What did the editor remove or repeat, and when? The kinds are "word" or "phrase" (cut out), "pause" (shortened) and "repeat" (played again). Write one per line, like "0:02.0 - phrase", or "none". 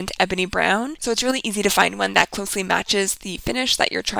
none